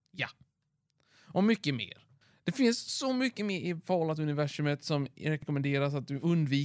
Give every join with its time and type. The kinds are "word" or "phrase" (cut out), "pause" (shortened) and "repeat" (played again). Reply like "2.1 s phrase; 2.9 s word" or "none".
none